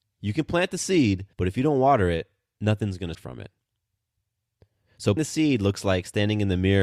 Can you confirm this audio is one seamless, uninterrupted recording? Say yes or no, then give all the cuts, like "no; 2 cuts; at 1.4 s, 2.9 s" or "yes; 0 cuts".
no; 3 cuts; at 1.3 s, 3.1 s, 5.2 s